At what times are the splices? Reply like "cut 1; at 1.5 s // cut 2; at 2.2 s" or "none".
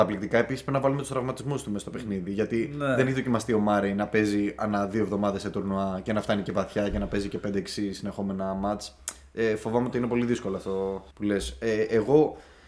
cut 1; at 11.1 s